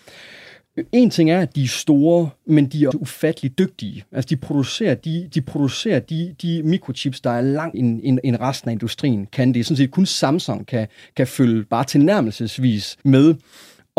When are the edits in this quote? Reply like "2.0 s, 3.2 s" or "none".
2.9 s, 5.3 s, 7.7 s, 10.6 s, 13.0 s